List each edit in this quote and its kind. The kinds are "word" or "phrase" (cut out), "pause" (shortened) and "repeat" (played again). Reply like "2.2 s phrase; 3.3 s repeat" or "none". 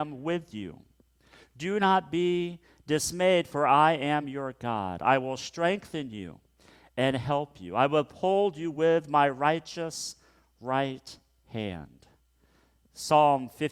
none